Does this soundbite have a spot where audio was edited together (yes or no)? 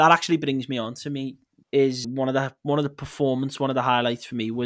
yes